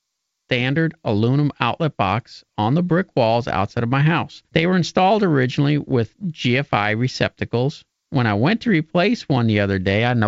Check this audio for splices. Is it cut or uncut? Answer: cut